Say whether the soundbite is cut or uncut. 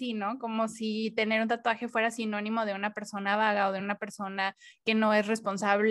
uncut